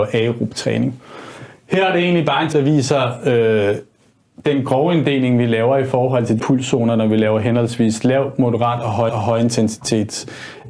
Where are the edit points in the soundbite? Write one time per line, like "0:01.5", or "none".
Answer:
0:02.5
0:06.4
0:09.1